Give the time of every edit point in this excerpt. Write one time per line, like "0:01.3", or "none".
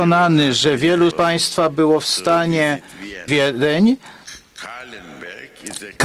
0:01.1
0:03.3